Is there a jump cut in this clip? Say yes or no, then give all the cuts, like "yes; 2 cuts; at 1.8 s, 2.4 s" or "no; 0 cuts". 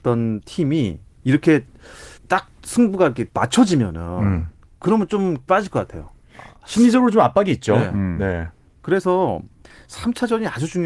yes; 3 cuts; at 2.2 s, 3.3 s, 5.5 s